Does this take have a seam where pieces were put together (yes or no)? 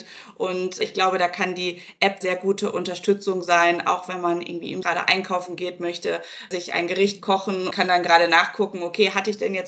yes